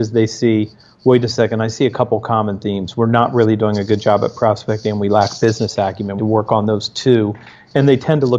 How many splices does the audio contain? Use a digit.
1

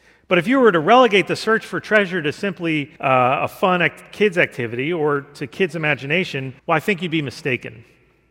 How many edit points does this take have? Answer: 2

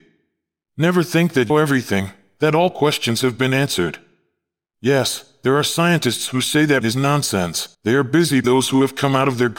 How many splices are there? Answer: 4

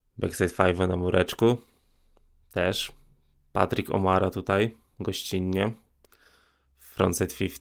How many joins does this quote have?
0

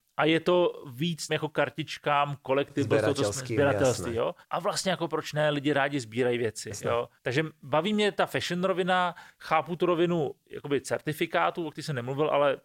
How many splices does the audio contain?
3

